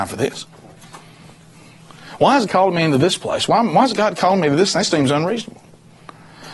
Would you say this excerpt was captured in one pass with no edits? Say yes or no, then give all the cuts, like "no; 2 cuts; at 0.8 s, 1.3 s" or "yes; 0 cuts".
no; 2 cuts; at 2.5 s, 4.9 s